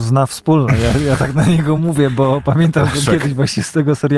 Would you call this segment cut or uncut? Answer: uncut